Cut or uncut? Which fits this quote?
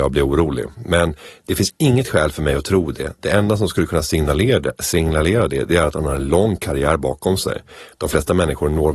uncut